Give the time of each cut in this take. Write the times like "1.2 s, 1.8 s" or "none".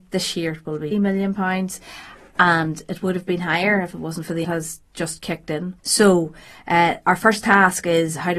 0.9 s, 4.4 s, 5.8 s